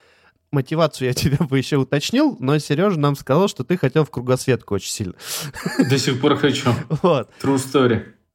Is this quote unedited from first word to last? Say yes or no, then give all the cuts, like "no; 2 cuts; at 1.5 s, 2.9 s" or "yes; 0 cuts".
yes; 0 cuts